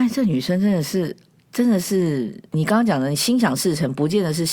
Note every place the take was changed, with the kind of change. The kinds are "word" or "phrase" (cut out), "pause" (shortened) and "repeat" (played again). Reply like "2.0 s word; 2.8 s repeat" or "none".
1.4 s pause; 2.5 s pause